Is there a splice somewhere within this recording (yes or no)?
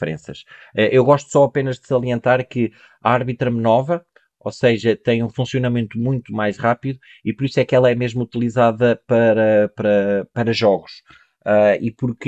no